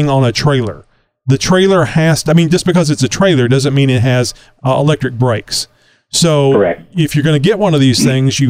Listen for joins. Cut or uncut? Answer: uncut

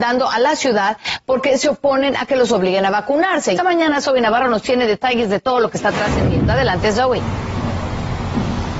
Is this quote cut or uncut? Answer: cut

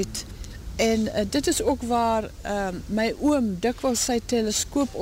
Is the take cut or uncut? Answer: uncut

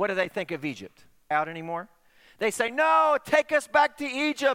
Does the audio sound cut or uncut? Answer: cut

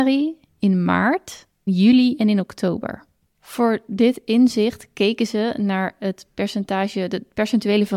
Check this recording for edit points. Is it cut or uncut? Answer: cut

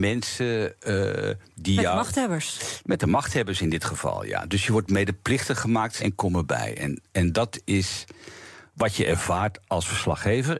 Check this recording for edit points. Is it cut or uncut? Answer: cut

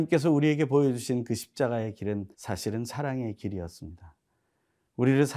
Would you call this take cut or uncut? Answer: cut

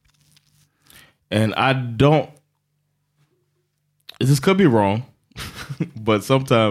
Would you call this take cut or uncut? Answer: uncut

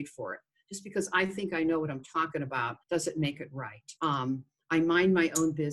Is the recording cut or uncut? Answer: cut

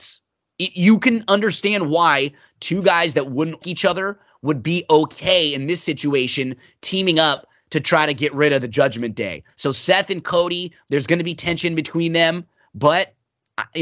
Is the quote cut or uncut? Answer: cut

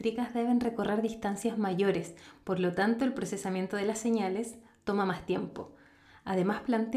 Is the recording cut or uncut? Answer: uncut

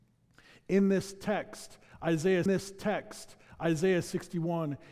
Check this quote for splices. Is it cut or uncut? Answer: cut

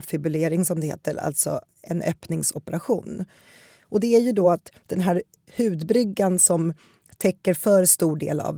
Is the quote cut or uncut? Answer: uncut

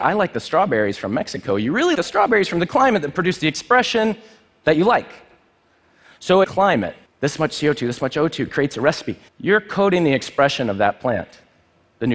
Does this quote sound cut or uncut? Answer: cut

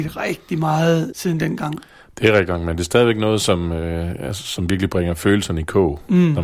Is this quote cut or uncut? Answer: uncut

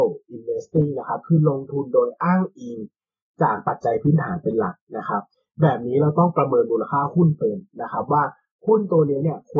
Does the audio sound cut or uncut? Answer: uncut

